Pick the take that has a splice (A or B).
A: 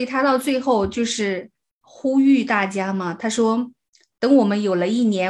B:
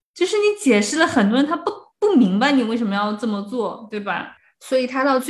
B